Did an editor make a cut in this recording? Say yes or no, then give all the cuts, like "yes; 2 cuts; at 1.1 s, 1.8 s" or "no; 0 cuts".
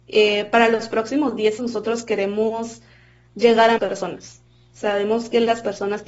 yes; 2 cuts; at 1.6 s, 3.8 s